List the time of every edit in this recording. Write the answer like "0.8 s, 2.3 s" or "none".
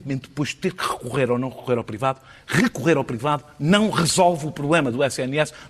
none